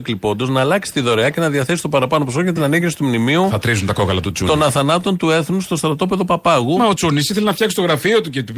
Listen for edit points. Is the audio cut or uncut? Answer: uncut